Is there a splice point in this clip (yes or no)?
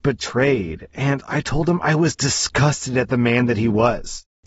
no